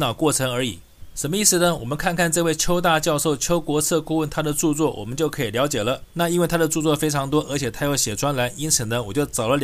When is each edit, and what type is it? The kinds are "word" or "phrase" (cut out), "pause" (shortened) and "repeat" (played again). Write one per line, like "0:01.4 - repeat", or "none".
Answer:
0:06.1 - pause